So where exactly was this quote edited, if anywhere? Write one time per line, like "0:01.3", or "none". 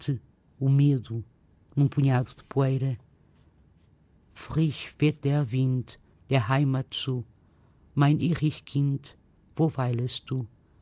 none

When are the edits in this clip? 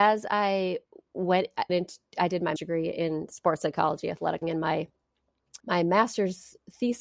0:01.7
0:02.6
0:04.4
0:05.6

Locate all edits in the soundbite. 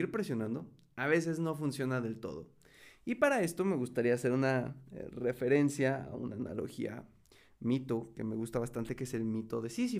none

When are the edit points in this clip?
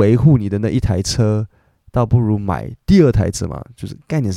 none

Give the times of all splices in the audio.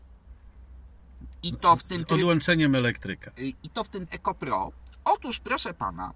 0:04.1

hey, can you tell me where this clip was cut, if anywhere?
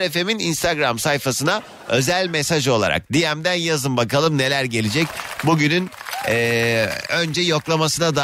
none

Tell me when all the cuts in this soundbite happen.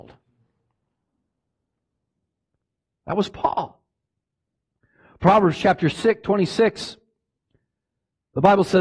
none

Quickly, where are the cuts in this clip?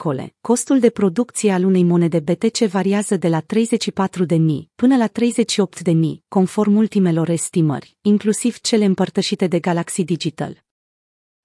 none

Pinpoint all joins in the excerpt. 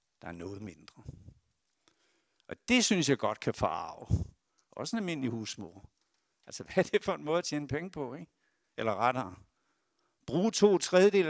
none

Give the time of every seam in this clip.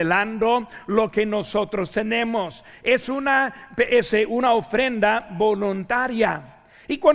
none

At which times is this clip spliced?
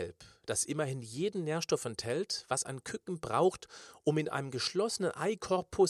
none

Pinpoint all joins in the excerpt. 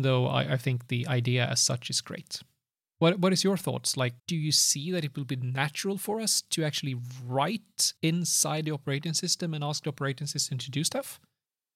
0:02.7
0:04.2
0:08.0

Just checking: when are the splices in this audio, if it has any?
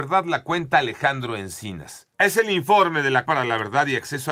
0:02.1
0:03.3

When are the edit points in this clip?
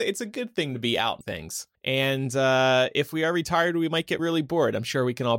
0:01.2
0:01.7
0:04.2

